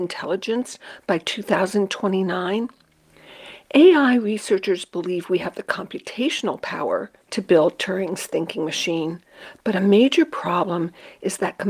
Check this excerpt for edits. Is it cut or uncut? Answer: cut